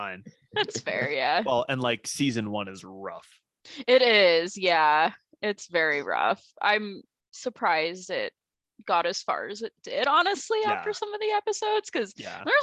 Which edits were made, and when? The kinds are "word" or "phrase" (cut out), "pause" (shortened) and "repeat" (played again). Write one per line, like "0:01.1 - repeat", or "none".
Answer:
none

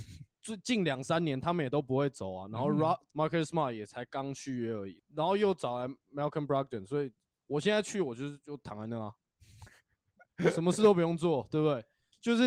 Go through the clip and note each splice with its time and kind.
0:03.1 - phrase

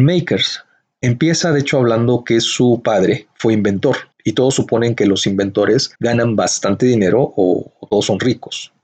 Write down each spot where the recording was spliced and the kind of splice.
0:04.1 - pause
0:05.9 - pause

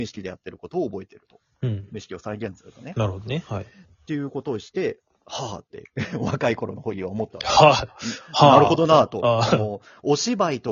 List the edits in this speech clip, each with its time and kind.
none

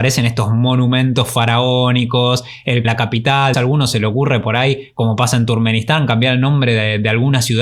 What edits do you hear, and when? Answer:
0:02.8 - phrase
0:03.5 - word

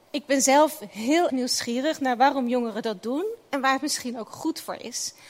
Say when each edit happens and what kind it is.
0:01.3 - word

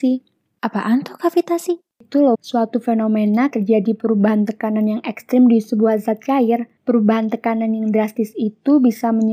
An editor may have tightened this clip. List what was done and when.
0:01.9 - pause
0:02.3 - word
0:03.5 - word
0:06.8 - pause

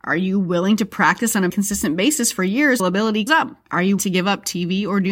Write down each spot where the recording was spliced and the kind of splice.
0:01.5 - word
0:02.8 - phrase
0:03.3 - word
0:04.0 - word

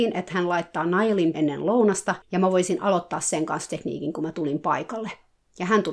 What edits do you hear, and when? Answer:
0:01.3 - word
0:02.2 - pause
0:03.7 - word

